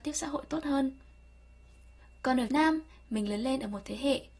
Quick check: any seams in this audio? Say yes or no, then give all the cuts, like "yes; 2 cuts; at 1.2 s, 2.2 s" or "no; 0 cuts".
yes; 1 cut; at 2.5 s